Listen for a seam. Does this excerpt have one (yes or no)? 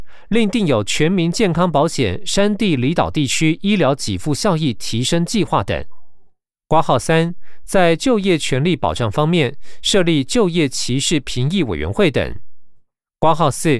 no